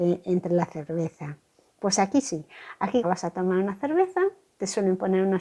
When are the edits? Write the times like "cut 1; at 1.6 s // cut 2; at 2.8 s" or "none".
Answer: cut 1; at 3.0 s